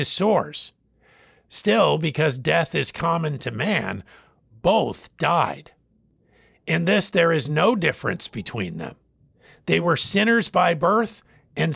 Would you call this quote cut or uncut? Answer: uncut